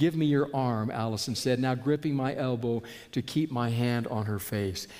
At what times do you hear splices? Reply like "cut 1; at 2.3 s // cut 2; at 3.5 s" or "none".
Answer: none